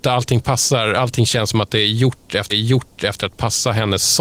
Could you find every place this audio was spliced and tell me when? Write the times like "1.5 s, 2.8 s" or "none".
2.5 s